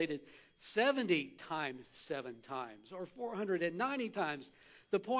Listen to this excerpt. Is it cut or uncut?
uncut